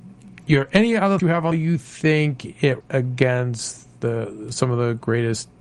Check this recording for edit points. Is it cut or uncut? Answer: cut